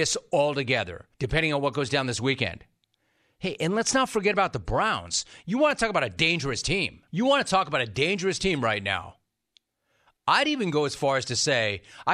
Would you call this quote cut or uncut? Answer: cut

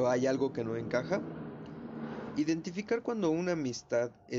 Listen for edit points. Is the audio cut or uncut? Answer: uncut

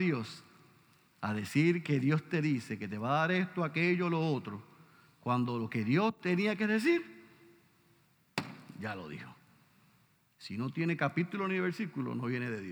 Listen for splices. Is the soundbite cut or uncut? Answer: uncut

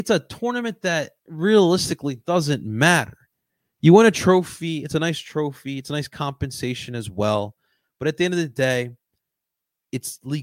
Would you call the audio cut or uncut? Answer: cut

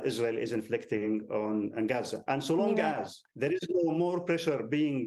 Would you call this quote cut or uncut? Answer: cut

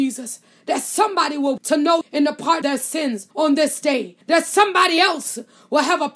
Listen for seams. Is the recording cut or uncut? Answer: cut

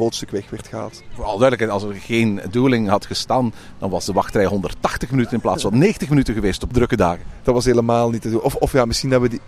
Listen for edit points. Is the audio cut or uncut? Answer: uncut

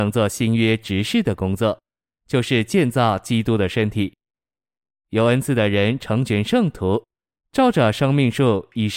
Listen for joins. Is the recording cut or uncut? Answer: uncut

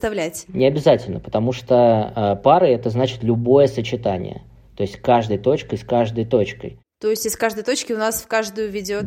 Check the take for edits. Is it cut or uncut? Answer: uncut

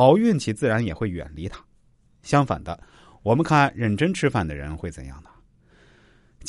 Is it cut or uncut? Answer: uncut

